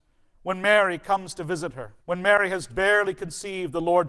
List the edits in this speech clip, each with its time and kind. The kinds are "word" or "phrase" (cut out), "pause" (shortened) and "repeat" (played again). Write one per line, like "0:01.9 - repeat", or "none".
0:02.0 - pause
0:02.7 - word